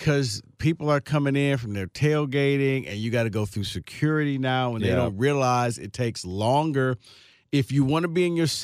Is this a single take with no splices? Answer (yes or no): yes